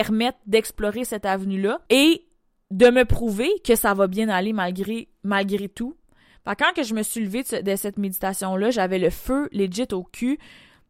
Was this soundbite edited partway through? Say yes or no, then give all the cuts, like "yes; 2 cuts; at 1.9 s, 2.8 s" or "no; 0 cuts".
yes; 1 cut; at 1.9 s